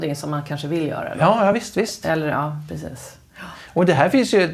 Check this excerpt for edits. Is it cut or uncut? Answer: uncut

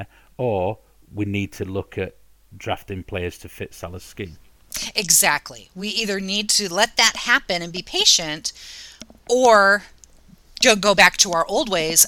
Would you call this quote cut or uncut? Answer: uncut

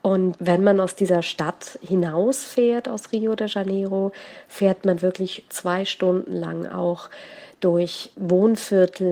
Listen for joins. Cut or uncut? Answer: uncut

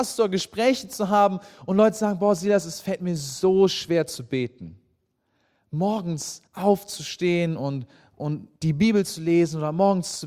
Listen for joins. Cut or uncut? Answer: cut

